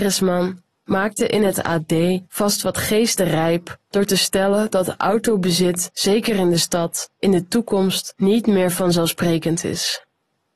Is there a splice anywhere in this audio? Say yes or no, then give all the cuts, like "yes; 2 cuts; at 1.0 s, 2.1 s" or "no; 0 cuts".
no; 0 cuts